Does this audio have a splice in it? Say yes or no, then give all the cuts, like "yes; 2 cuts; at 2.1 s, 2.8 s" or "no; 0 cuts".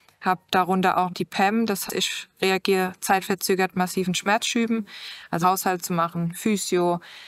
yes; 4 cuts; at 1.1 s, 1.9 s, 3.7 s, 5.4 s